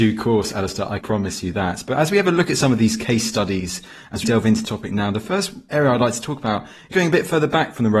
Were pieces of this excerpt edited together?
yes; 4 cuts; at 1.0 s, 4.2 s, 4.6 s, 6.9 s

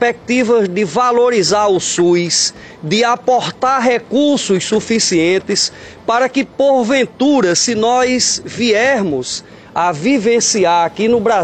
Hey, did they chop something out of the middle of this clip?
no; 0 cuts

